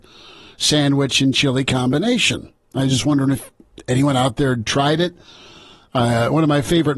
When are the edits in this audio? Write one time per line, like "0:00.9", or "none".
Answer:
none